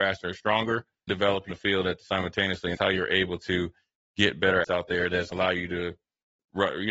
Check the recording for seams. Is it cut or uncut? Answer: cut